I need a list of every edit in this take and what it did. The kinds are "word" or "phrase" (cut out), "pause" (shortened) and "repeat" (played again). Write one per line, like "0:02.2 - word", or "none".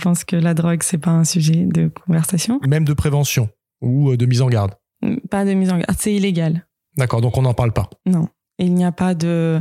none